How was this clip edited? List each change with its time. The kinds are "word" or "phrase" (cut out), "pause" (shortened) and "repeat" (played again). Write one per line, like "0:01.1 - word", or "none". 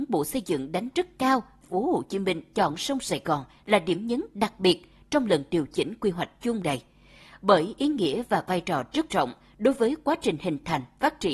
0:00.9 - word
0:01.6 - phrase
0:06.6 - word
0:09.1 - word